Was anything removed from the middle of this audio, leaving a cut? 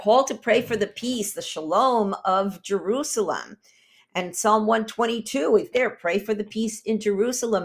yes; 1 cut; at 5.7 s

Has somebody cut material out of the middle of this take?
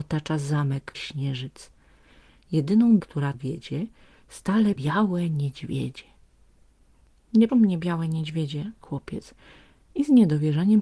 yes; 6 cuts; at 0.9 s, 3.0 s, 3.3 s, 4.8 s, 7.5 s, 8.8 s

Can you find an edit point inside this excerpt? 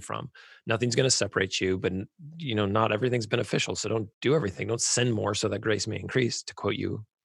yes; 1 cut; at 4.1 s

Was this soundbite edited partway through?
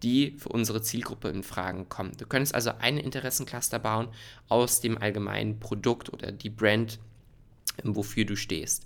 no; 0 cuts

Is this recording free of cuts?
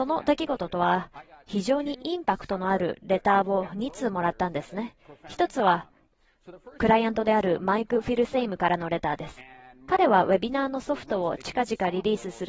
yes; 0 cuts

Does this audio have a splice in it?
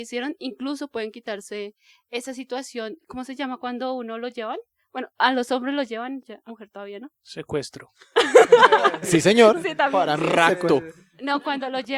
yes; 3 cuts; at 6.5 s, 7.2 s, 9.0 s

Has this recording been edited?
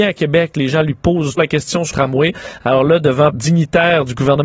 yes; 3 cuts; at 1.4 s, 1.9 s, 3.3 s

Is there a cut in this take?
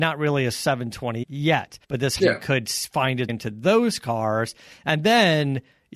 yes; 4 cuts; at 1.2 s, 1.8 s, 2.2 s, 3.3 s

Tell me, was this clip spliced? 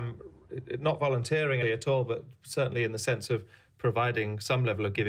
yes; 1 cut; at 1.6 s

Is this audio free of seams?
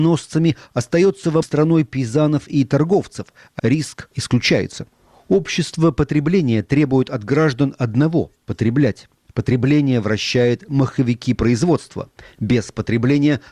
no; 3 cuts; at 1.4 s, 3.6 s, 4.1 s

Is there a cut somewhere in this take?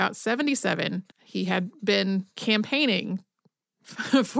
yes; 1 cut; at 1.1 s

